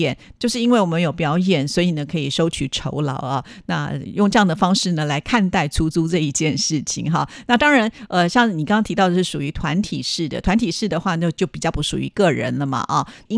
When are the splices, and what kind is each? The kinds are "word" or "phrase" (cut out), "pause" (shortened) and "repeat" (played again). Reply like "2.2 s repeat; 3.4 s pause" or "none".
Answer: none